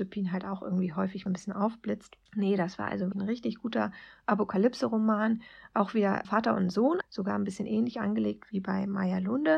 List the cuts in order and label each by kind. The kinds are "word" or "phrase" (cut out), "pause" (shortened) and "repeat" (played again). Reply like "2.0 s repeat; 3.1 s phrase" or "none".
1.3 s phrase; 2.3 s pause; 3.1 s word; 6.2 s word; 7.0 s word